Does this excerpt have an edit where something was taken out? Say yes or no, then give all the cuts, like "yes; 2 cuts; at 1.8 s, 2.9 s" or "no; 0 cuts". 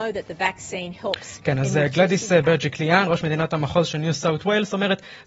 no; 0 cuts